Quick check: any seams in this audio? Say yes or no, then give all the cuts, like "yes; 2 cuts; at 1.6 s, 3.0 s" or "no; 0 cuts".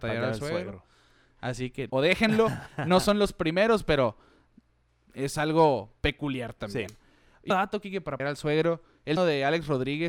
yes; 4 cuts; at 1.9 s, 7.5 s, 8.2 s, 9.2 s